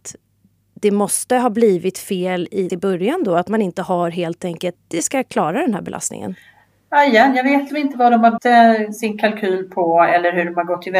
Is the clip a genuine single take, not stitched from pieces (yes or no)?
no